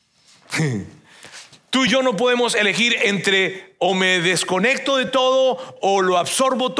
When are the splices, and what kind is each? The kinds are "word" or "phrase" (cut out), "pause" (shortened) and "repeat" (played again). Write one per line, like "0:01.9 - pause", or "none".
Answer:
none